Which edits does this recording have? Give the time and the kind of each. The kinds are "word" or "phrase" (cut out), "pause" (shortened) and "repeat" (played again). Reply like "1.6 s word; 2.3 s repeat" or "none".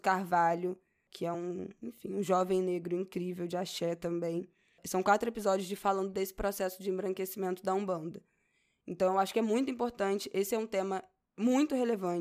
none